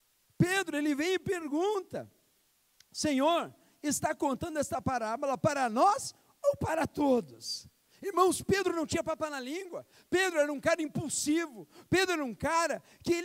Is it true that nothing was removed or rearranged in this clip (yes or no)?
yes